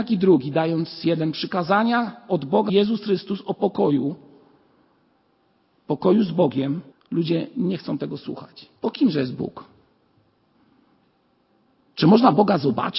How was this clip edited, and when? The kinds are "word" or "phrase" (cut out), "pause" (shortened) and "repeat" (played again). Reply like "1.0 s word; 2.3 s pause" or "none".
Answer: 2.7 s phrase; 6.9 s pause; 8.8 s pause